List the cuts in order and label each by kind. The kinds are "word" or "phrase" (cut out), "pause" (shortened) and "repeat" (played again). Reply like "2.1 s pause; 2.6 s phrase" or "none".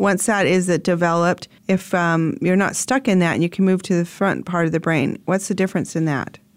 1.6 s pause